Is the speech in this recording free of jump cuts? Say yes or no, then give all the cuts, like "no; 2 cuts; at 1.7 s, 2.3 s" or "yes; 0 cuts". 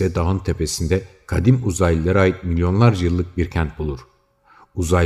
yes; 0 cuts